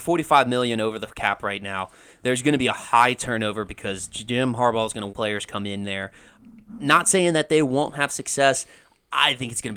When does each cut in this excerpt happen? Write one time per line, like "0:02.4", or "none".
0:05.1